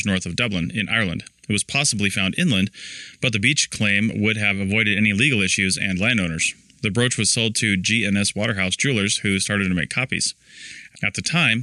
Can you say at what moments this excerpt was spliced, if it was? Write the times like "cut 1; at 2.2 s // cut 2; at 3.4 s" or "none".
none

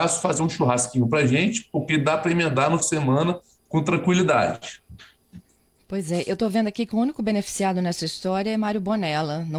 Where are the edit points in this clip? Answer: cut 1; at 2.8 s

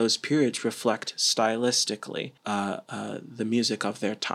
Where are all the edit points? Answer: cut 1; at 2.4 s

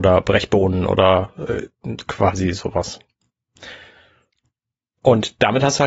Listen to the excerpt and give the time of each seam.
none

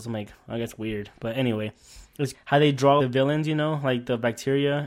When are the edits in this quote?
cut 1; at 2.3 s // cut 2; at 3.0 s

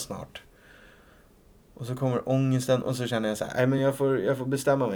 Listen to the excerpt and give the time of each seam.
none

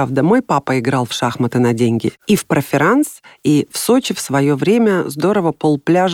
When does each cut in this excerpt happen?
none

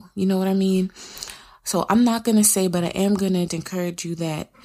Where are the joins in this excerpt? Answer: cut 1; at 3.5 s

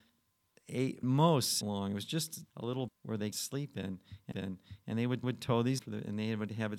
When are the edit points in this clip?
cut 1; at 1.0 s // cut 2; at 1.6 s // cut 3; at 2.5 s // cut 4; at 2.9 s // cut 5; at 3.3 s // cut 6; at 4.3 s // cut 7; at 5.2 s // cut 8; at 5.8 s

